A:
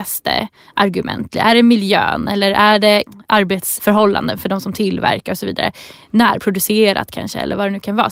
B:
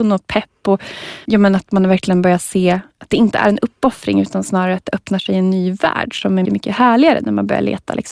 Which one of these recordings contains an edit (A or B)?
B